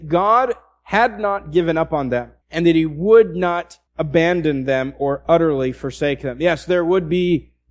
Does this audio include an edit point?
yes; 2 cuts; at 2.4 s, 3.9 s

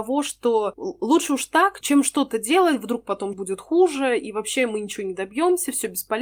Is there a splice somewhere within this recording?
yes; 2 cuts; at 1.8 s, 3.3 s

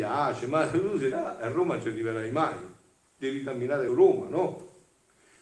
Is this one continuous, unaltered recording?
no; 2 cuts; at 1.1 s, 3.9 s

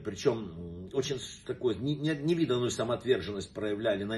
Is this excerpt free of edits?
yes; 0 cuts

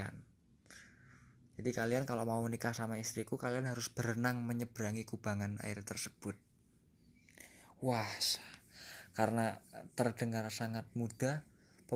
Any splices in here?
no; 0 cuts

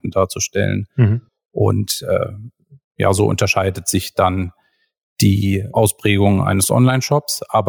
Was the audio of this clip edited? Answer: no; 0 cuts

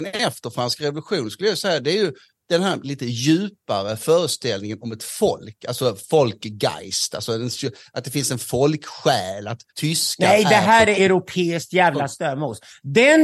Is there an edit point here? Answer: yes; 1 cut; at 9.7 s

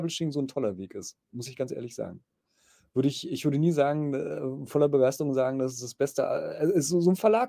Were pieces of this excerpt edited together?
no; 0 cuts

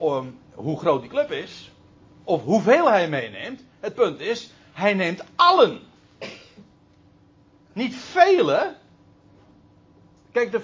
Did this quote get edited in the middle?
no; 0 cuts

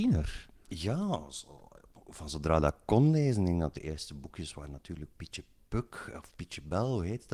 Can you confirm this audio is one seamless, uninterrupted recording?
yes; 0 cuts

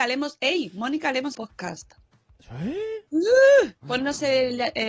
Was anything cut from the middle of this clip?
yes; 2 cuts; at 1.3 s, 3.1 s

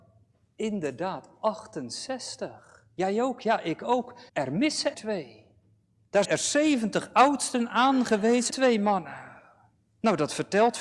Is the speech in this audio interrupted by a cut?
yes; 4 cuts; at 4.3 s, 4.9 s, 6.2 s, 8.5 s

